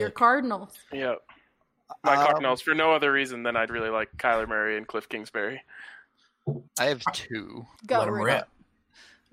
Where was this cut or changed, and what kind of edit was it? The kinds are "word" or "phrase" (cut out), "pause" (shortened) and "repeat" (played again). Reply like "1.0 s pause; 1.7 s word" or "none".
3.7 s word; 6.7 s pause; 7.8 s pause